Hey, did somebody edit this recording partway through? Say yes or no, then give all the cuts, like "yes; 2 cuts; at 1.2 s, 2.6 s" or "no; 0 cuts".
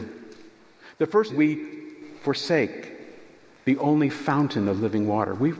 yes; 1 cut; at 1.3 s